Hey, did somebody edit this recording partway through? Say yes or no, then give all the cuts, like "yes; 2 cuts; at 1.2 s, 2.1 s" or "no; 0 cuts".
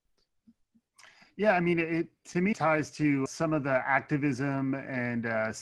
yes; 2 cuts; at 2.5 s, 3.3 s